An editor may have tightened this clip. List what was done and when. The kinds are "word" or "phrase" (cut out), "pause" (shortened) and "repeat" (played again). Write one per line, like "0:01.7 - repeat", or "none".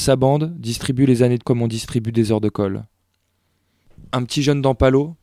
0:01.4 - word